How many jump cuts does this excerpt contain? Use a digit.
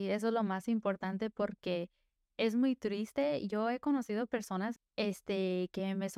1